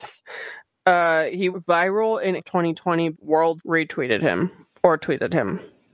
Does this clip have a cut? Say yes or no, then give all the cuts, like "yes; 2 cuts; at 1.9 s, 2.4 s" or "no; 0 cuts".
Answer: yes; 4 cuts; at 1.5 s, 2.4 s, 3.1 s, 3.6 s